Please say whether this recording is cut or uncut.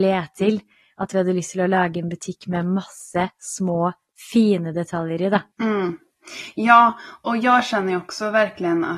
cut